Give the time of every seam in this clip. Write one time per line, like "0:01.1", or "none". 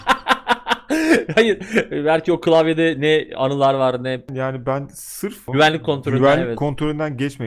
none

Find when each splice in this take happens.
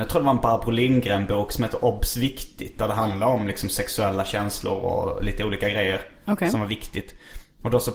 none

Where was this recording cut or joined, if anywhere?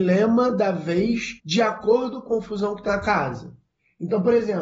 0:01.4
0:02.3
0:02.9

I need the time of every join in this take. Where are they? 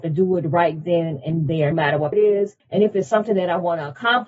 0:01.7
0:02.1
0:02.6

